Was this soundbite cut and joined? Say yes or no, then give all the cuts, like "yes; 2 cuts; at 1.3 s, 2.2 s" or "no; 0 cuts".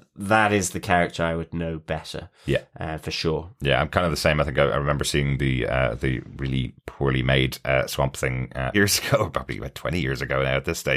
yes; 2 cuts; at 6.8 s, 8.7 s